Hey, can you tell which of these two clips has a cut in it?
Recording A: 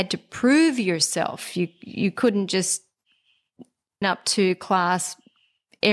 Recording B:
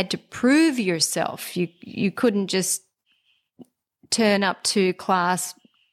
A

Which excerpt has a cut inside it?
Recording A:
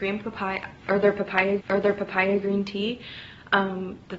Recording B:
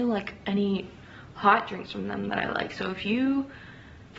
A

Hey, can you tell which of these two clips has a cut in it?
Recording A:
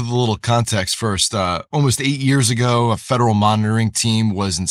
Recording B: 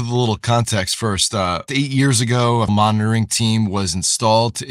B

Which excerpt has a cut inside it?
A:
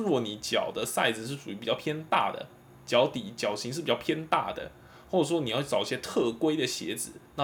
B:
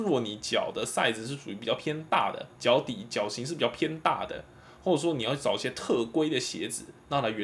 B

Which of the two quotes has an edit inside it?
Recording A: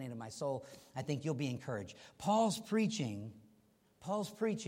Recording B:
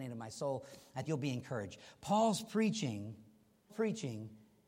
B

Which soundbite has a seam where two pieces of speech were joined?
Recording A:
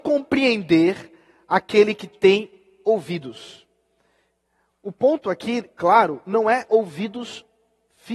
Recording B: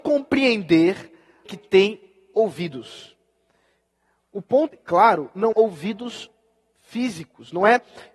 B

